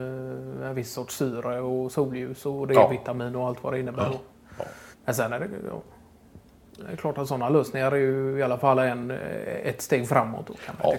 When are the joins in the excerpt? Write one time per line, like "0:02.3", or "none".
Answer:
0:04.9